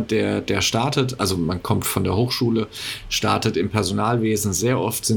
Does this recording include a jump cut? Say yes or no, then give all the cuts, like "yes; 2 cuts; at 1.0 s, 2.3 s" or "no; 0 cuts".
no; 0 cuts